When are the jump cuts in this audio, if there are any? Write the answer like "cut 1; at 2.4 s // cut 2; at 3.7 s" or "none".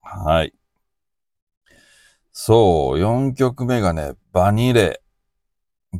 cut 1; at 4.2 s